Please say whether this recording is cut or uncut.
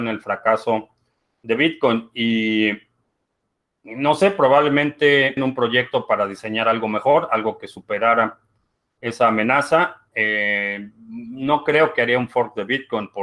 cut